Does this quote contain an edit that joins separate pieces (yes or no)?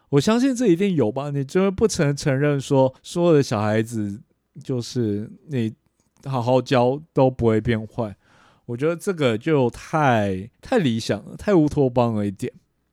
yes